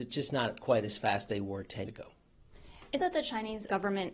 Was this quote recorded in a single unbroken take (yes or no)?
no